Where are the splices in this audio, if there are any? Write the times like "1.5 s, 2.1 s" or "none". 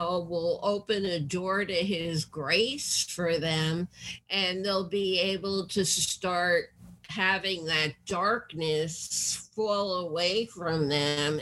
none